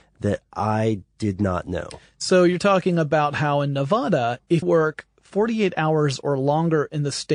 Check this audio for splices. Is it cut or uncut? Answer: cut